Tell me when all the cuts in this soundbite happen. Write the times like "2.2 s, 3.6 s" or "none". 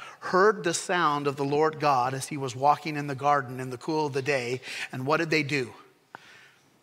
none